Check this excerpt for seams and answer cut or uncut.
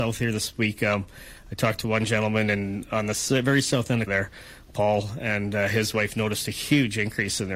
cut